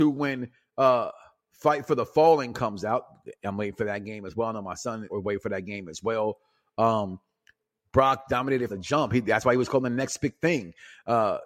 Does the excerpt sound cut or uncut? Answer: cut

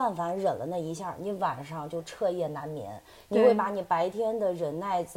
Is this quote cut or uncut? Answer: uncut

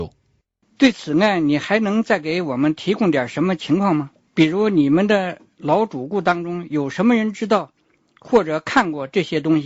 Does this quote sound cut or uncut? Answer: uncut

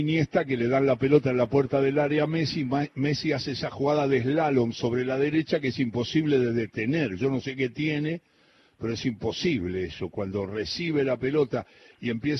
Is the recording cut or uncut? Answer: uncut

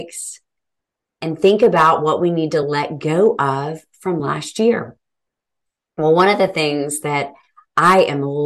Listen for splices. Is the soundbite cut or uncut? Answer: uncut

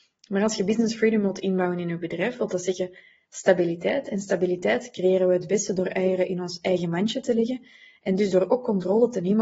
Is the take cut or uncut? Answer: uncut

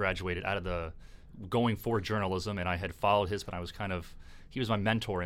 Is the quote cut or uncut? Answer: cut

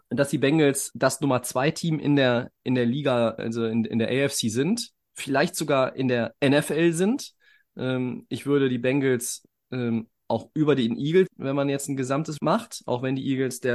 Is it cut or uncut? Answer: cut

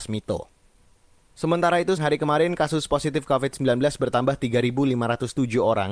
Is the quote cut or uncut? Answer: cut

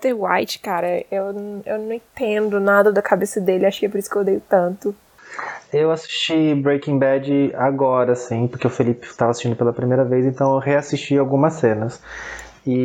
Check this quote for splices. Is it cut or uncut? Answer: cut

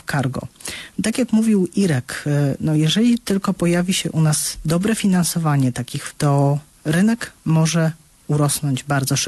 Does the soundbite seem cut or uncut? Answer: cut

